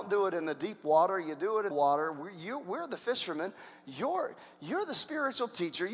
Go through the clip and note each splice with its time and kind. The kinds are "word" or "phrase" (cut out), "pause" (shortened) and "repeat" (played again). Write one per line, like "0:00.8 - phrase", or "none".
0:01.7 - phrase

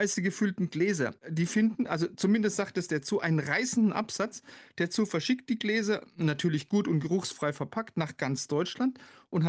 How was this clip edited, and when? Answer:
0:01.2 - pause

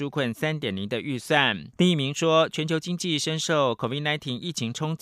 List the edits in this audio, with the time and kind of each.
0:01.7 - pause

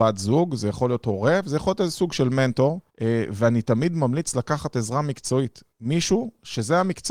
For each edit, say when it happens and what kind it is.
0:02.9 - pause
0:05.7 - pause

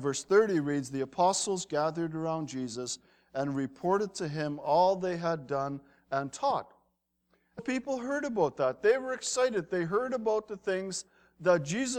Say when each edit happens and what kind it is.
0:07.6 - word

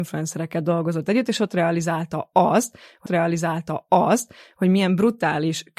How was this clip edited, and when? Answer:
0:03.1 - repeat

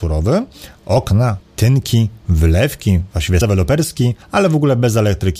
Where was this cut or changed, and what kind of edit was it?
0:01.4 - word
0:03.4 - word
0:04.2 - pause

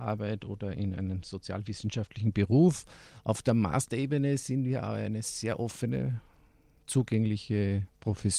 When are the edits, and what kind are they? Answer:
none

